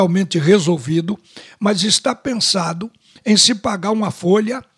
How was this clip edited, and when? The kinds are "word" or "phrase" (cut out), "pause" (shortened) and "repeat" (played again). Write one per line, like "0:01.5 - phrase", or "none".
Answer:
none